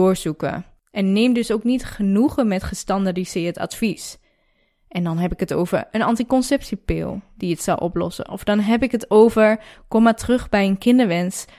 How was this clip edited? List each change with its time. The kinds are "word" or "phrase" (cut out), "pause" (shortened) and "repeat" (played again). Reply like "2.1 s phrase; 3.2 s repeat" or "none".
none